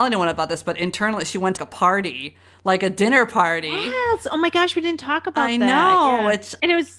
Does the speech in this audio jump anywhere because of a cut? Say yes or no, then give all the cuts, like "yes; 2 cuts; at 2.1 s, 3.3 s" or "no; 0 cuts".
yes; 1 cut; at 1.6 s